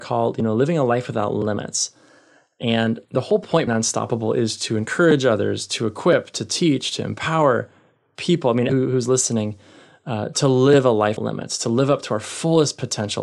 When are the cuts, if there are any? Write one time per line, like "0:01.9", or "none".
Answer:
0:03.0
0:03.7
0:08.7
0:11.2